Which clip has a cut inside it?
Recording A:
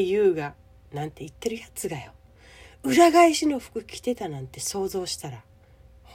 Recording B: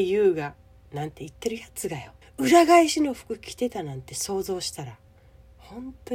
B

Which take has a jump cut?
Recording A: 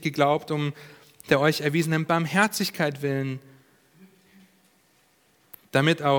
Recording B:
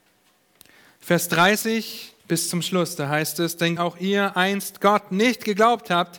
B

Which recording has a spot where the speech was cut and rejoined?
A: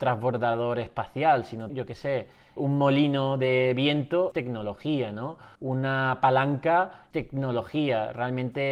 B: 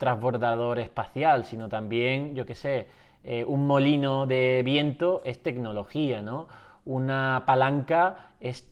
A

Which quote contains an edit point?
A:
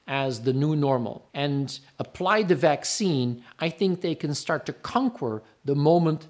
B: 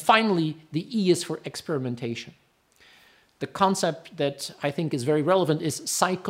A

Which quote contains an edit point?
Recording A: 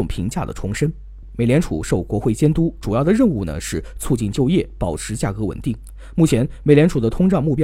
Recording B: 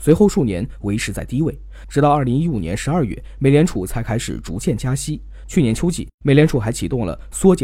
B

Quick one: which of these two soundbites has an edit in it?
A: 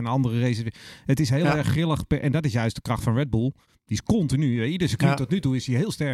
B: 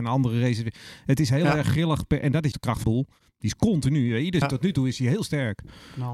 B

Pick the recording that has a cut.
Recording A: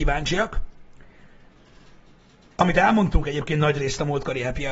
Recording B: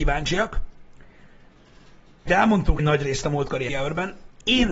B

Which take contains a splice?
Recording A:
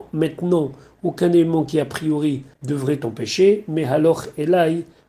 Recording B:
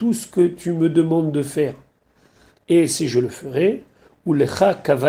A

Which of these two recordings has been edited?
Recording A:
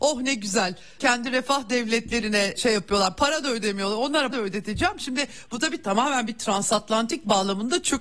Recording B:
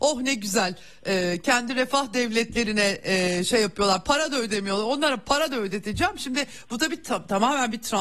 A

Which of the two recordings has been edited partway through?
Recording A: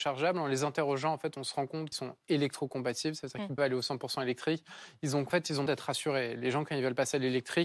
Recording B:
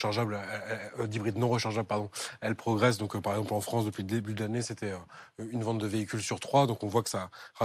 A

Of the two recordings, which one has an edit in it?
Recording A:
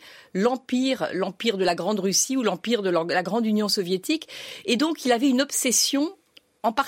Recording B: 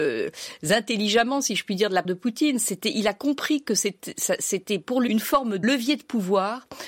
B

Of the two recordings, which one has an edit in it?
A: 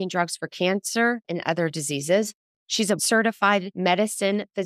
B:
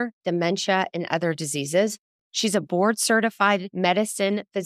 A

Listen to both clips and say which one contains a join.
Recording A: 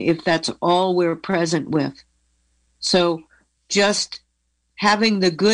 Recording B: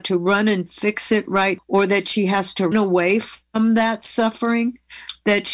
B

